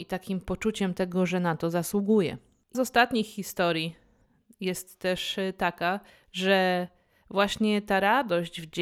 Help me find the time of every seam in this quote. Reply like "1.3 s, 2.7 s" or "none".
2.7 s, 6.1 s